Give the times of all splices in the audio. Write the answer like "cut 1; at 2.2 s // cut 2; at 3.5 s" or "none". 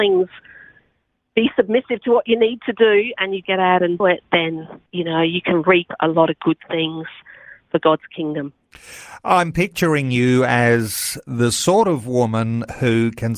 cut 1; at 3.4 s // cut 2; at 4.0 s // cut 3; at 4.9 s